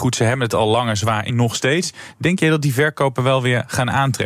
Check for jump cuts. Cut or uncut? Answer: cut